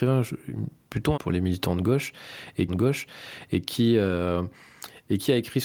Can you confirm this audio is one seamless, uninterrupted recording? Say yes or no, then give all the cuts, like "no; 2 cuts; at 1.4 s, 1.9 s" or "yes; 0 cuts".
no; 2 cuts; at 1.1 s, 2.7 s